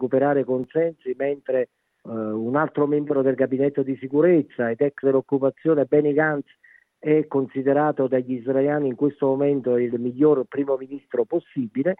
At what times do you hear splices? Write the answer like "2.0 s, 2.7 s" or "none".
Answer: 5.0 s